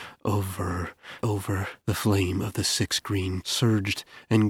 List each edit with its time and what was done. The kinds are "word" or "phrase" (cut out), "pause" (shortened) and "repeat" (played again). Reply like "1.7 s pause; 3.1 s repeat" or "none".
1.2 s word; 1.8 s pause; 3.4 s word